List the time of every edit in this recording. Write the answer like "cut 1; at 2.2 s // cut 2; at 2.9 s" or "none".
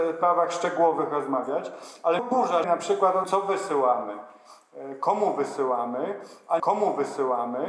cut 1; at 2.2 s // cut 2; at 2.6 s // cut 3; at 3.2 s // cut 4; at 6.6 s